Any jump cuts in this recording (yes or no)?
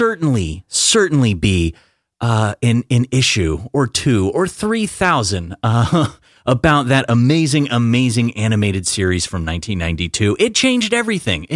no